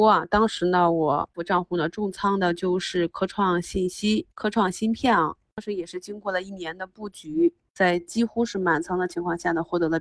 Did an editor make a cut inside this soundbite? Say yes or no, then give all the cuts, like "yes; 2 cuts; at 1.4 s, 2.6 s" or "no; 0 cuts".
yes; 2 cuts; at 1.3 s, 4.3 s